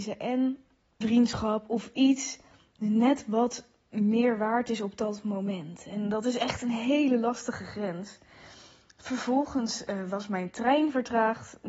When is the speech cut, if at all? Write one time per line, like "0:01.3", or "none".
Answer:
0:01.0